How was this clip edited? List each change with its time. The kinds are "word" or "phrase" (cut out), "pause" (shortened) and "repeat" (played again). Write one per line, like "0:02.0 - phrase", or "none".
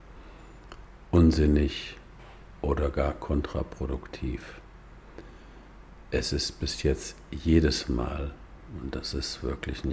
none